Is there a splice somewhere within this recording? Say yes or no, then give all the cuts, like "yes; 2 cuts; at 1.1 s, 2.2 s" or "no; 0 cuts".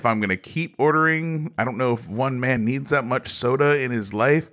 no; 0 cuts